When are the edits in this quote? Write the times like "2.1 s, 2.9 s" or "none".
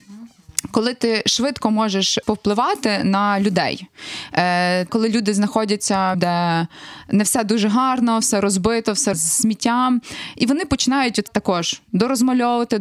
2.2 s, 4.9 s, 6.1 s, 9.1 s, 11.3 s

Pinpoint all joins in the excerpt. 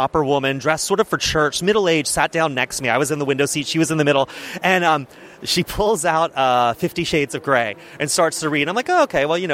none

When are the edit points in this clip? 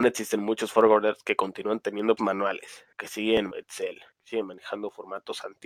2.2 s, 2.9 s, 3.5 s, 4.1 s

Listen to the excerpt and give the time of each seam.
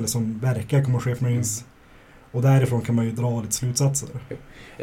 1.2 s

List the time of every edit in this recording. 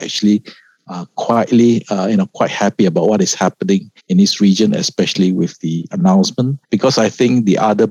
4.0 s, 6.6 s

